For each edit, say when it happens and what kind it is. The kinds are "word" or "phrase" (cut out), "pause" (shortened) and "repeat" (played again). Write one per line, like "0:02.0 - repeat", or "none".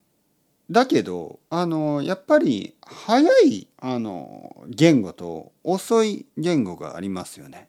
0:01.5 - pause
0:03.7 - pause